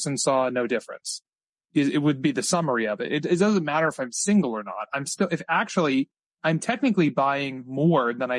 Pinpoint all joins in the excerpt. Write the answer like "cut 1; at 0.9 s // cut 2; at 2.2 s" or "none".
none